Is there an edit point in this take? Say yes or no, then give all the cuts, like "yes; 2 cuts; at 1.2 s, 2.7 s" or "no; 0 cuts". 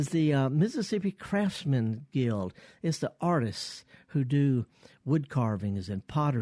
no; 0 cuts